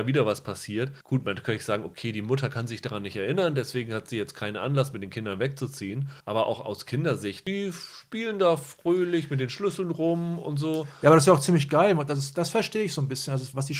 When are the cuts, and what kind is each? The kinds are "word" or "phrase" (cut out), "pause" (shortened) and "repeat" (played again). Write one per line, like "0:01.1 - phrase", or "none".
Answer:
0:01.0 - pause
0:06.2 - pause